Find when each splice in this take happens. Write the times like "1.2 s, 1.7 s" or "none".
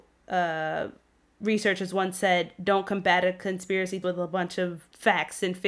4.0 s